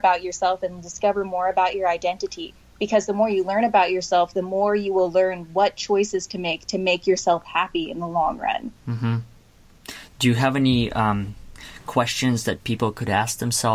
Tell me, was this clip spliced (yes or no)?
no